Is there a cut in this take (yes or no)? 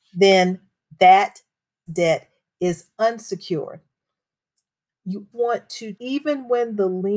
yes